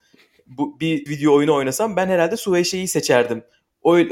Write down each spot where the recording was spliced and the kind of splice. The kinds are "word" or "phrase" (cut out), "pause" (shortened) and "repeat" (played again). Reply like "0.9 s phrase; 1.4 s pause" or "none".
1.1 s word